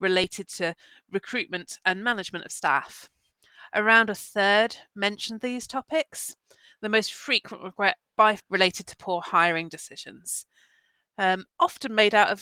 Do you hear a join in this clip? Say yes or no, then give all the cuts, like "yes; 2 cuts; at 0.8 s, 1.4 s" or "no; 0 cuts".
yes; 1 cut; at 8.4 s